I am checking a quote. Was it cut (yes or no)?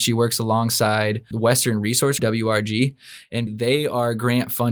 yes